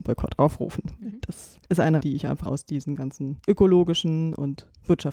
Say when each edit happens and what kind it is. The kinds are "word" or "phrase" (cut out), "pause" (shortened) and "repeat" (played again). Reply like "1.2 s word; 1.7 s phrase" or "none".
1.7 s pause; 2.0 s word; 2.5 s word; 3.4 s pause